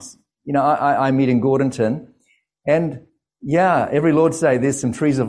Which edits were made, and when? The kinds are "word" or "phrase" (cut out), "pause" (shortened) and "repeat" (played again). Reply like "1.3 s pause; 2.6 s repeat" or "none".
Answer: none